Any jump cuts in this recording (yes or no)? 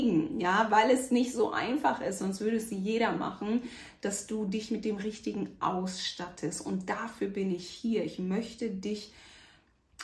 no